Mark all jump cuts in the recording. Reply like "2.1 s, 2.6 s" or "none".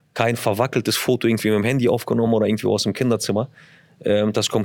none

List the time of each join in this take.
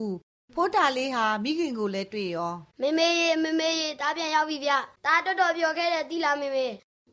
2.7 s, 5.0 s

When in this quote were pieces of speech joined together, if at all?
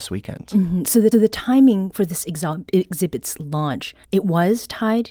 1.1 s, 4.0 s

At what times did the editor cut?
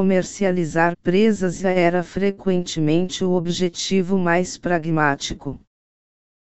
0.9 s, 1.6 s

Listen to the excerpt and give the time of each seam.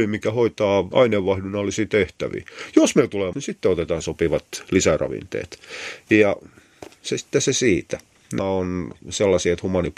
3.3 s, 4.0 s, 8.4 s

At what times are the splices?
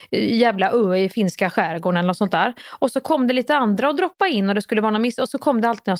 none

